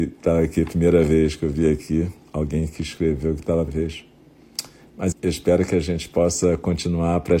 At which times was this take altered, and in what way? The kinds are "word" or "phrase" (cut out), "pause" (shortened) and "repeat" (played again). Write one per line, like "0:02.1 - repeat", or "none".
0:03.7 - word
0:05.1 - word